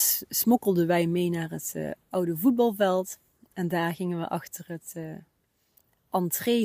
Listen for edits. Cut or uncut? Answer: uncut